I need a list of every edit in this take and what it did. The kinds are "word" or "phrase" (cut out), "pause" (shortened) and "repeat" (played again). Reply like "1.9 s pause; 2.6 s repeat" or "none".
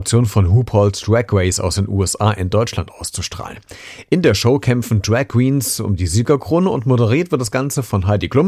none